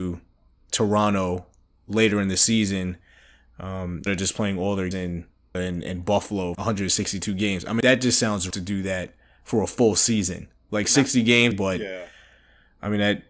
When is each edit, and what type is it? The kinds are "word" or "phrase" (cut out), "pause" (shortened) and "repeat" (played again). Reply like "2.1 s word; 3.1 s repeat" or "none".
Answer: 4.1 s word; 4.9 s word; 5.5 s word; 6.5 s word; 7.8 s word; 8.5 s word; 11.5 s word